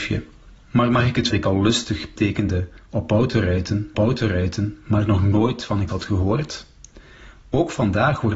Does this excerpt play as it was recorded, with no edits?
no; 4 cuts; at 1.3 s, 2.2 s, 3.9 s, 5.9 s

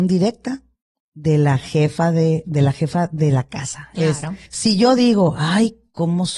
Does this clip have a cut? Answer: yes; 1 cut; at 4.4 s

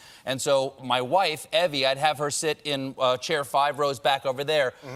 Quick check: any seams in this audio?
no; 0 cuts

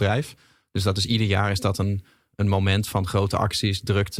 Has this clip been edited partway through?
no; 0 cuts

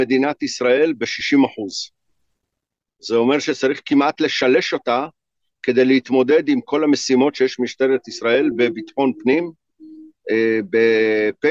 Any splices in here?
no; 0 cuts

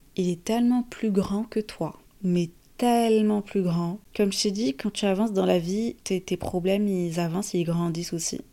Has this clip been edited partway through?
yes; 1 cut; at 6.0 s

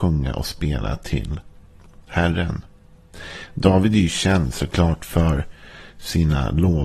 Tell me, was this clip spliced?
no; 0 cuts

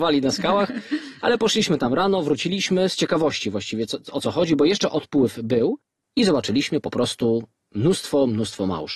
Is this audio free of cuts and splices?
yes; 0 cuts

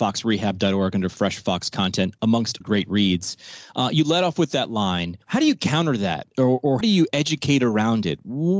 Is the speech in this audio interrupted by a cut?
yes; 4 cuts; at 2.6 s, 5.2 s, 6.3 s, 6.8 s

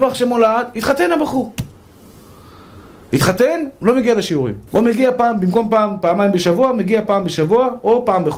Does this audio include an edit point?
yes; 1 cut; at 4.7 s

